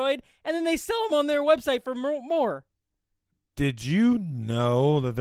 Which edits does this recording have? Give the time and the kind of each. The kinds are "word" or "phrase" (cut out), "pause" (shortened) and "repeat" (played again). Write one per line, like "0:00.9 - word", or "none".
none